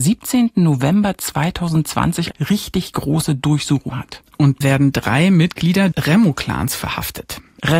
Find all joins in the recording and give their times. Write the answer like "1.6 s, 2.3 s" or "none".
2.3 s, 3.9 s, 4.6 s, 5.9 s